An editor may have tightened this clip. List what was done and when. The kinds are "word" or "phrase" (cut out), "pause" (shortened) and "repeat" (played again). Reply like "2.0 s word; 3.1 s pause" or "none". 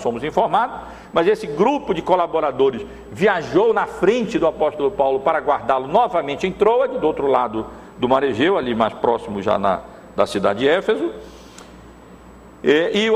none

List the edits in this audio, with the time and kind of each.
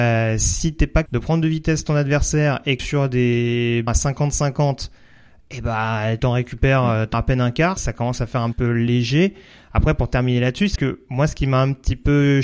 1.1 s word; 2.8 s word; 3.9 s word; 6.2 s word; 7.1 s word; 7.8 s word; 8.5 s word; 10.8 s word

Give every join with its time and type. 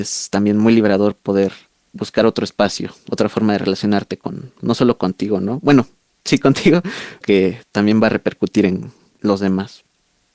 4.6 s word; 7.2 s word

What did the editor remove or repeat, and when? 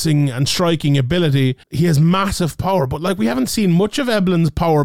1.6 s pause

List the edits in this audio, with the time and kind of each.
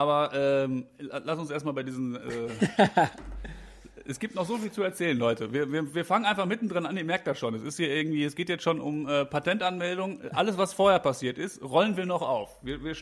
none

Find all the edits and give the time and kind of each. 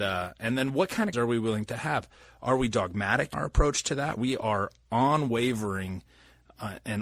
1.1 s word; 3.3 s word; 4.2 s word

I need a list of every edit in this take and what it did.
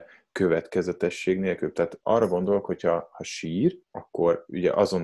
2.0 s word; 3.8 s pause

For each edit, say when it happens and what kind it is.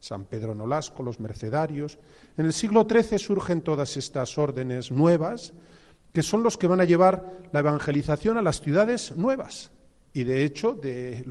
none

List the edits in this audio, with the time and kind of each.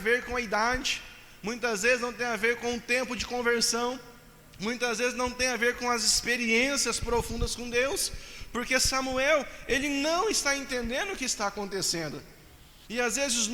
none

